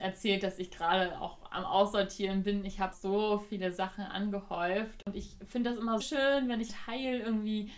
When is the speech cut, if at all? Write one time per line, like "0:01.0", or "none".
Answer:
0:02.9
0:06.0
0:06.7